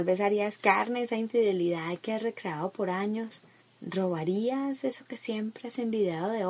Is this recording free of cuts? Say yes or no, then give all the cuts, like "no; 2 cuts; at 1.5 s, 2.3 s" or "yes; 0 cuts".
no; 1 cut; at 3.6 s